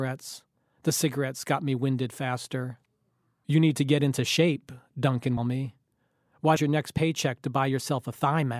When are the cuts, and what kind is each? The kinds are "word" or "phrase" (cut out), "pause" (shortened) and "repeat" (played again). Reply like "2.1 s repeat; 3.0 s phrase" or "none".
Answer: 5.4 s phrase; 6.6 s phrase